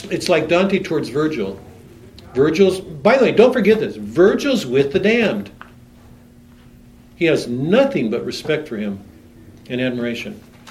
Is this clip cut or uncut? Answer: uncut